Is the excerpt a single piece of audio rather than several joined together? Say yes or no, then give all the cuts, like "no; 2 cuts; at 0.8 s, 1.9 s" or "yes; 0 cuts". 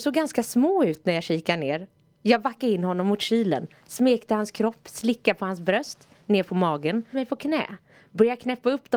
no; 1 cut; at 7.1 s